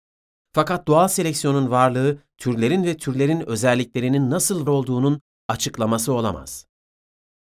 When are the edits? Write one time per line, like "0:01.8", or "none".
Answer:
0:04.7